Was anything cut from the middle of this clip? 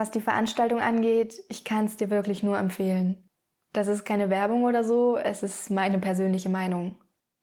no; 0 cuts

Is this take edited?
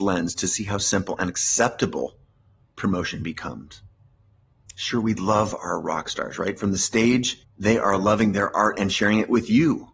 no; 0 cuts

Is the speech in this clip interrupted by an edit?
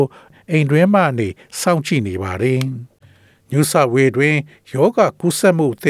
no; 0 cuts

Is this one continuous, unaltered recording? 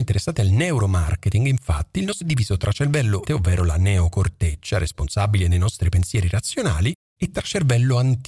no; 2 cuts; at 2.2 s, 3.3 s

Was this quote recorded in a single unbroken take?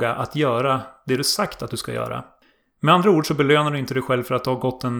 yes; 0 cuts

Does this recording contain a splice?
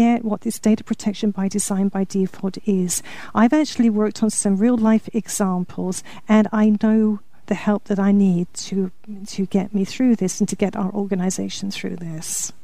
no; 0 cuts

